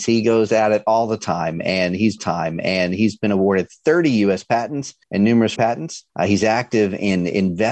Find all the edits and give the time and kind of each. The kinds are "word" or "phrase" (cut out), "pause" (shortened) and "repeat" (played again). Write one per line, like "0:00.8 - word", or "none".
0:02.2 - repeat
0:05.0 - pause
0:05.6 - word
0:06.1 - pause